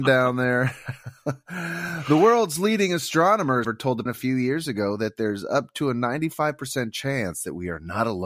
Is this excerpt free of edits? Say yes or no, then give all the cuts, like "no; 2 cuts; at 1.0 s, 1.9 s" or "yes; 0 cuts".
no; 2 cuts; at 3.6 s, 4.1 s